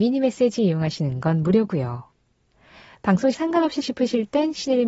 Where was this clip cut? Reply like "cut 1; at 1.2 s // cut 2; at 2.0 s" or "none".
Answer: cut 1; at 3.3 s // cut 2; at 3.8 s